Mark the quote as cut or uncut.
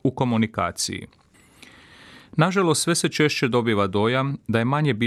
uncut